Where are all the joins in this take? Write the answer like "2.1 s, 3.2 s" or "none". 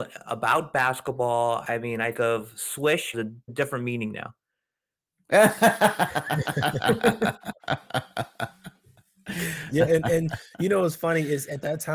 2.1 s, 3.1 s, 3.5 s, 9.7 s